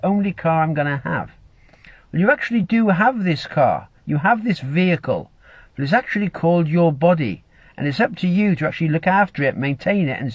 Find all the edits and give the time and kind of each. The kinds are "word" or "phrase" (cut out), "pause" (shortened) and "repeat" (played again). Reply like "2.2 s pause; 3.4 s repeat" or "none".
none